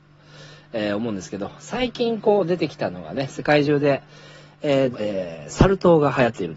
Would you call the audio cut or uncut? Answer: cut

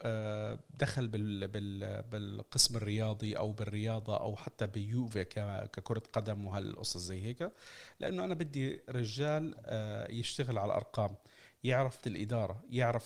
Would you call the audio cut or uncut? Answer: cut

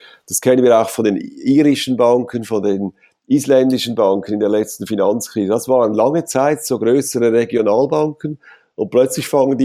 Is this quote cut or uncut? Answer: uncut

